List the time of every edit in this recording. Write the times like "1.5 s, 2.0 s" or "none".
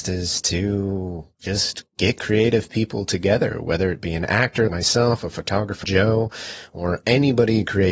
4.7 s, 5.8 s